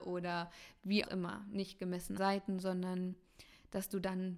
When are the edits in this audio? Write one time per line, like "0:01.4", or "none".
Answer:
0:01.0
0:02.2